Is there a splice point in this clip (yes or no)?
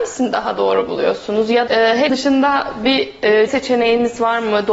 yes